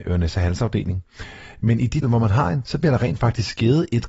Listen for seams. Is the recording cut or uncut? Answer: cut